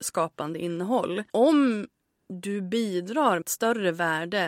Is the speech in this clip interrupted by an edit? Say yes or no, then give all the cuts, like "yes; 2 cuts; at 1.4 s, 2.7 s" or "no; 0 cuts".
yes; 2 cuts; at 1.3 s, 3.4 s